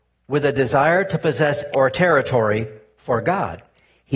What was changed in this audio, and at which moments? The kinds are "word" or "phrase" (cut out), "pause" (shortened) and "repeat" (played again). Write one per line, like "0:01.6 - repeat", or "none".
0:01.7 - phrase